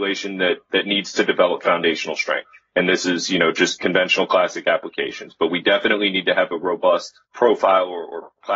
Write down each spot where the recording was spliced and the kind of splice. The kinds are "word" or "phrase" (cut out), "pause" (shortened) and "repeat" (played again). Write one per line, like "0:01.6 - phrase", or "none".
0:07.2 - pause